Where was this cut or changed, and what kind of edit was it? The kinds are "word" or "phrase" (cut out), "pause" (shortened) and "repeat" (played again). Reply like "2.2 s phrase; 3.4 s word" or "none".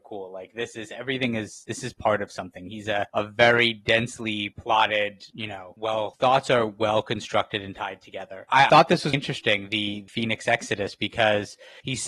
6.1 s word; 8.5 s word; 9.1 s word